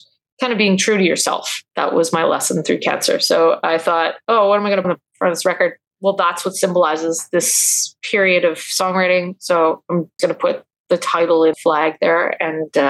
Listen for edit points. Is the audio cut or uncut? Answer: cut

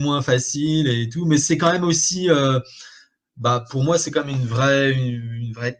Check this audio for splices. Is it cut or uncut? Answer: uncut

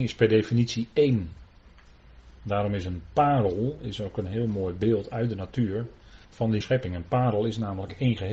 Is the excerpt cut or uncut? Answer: cut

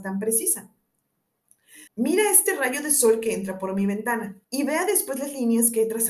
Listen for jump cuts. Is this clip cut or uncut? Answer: cut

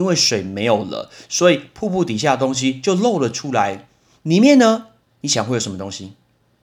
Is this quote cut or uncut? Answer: uncut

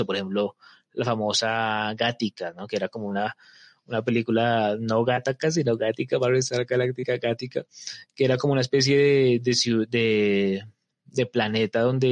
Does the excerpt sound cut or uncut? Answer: uncut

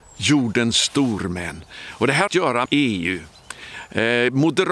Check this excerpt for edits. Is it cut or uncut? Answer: cut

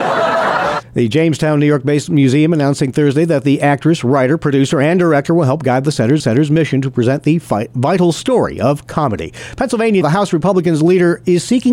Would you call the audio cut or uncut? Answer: cut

